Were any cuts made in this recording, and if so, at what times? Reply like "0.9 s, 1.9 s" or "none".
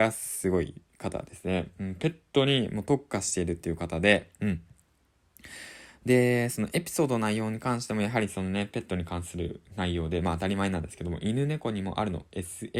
none